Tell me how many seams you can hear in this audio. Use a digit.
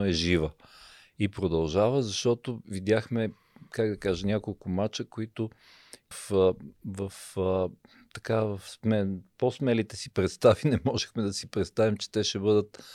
1